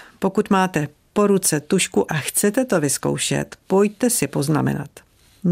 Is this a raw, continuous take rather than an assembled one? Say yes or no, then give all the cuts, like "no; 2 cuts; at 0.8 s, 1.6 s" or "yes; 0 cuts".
no; 1 cut; at 2.1 s